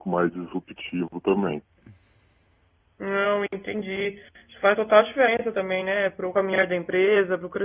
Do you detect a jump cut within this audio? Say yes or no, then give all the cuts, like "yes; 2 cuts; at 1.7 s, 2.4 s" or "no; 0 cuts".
no; 0 cuts